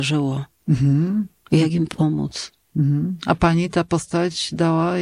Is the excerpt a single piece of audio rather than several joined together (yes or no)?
yes